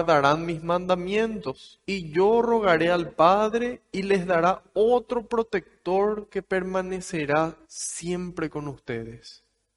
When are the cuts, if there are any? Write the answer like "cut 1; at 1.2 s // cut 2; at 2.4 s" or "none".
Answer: cut 1; at 1.8 s // cut 2; at 7.6 s